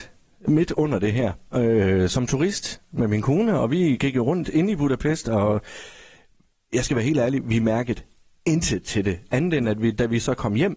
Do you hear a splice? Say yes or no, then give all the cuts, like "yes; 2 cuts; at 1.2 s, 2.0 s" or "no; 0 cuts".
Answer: no; 0 cuts